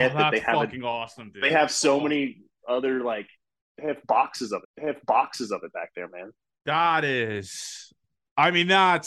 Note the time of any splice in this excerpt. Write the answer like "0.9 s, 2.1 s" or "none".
4.6 s

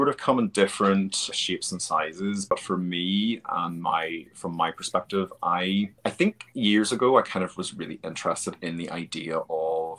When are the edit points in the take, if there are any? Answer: 1.3 s, 6.0 s

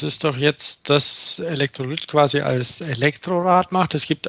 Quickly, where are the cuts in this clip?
1.4 s

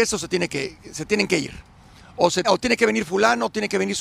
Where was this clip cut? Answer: 2.4 s

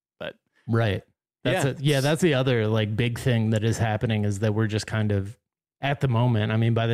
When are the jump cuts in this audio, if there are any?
none

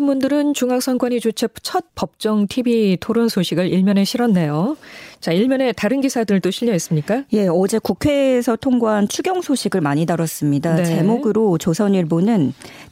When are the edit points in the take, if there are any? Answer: 1.9 s

